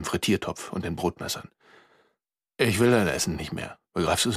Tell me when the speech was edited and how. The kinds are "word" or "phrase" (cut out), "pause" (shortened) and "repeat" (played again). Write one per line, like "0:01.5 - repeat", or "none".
0:02.3 - pause